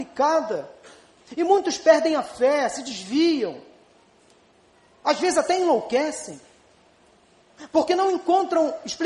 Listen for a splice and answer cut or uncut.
uncut